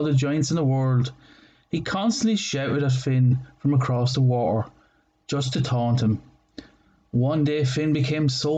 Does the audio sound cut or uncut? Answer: uncut